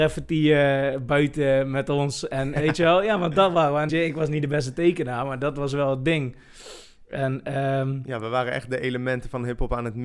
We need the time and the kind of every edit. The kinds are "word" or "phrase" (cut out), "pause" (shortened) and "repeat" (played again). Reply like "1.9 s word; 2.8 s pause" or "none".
3.9 s phrase